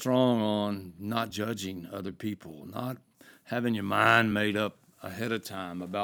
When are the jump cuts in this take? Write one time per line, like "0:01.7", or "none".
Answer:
none